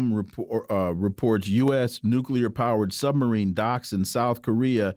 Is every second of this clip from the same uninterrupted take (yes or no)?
yes